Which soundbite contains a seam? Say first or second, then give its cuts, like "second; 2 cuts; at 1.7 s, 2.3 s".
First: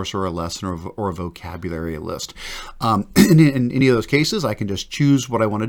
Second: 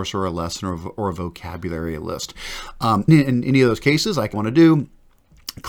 second; 2 cuts; at 3.1 s, 4.3 s